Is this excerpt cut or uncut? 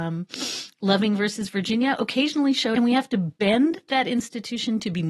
cut